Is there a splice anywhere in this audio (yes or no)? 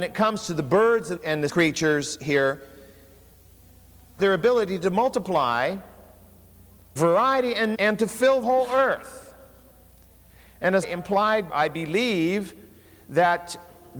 yes